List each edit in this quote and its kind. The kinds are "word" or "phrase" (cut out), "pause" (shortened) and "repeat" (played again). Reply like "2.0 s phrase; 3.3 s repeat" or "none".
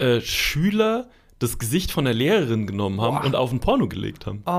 none